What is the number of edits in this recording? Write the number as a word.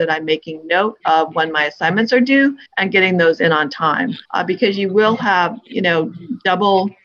two